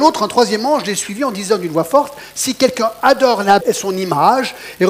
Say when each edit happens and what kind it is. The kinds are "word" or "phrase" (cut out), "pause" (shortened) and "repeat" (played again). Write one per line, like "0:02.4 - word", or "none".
0:03.6 - word